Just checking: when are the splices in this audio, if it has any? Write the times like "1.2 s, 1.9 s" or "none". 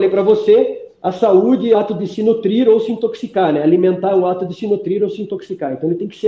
1.7 s